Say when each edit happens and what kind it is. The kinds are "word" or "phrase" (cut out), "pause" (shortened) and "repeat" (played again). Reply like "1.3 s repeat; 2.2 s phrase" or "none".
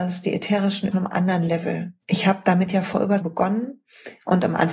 0.9 s phrase; 2.0 s pause; 3.2 s phrase